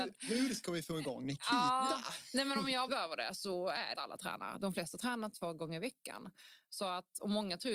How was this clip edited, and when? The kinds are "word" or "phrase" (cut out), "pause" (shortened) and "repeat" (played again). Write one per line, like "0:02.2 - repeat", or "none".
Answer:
0:02.9 - phrase
0:03.9 - phrase
0:05.3 - word